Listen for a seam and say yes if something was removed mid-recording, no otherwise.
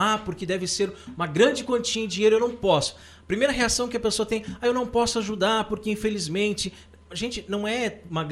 no